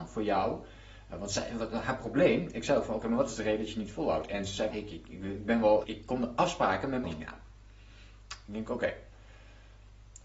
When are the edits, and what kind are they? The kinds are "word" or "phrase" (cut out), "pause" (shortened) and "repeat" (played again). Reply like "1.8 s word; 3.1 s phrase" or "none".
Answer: 4.7 s word; 5.8 s word; 7.0 s word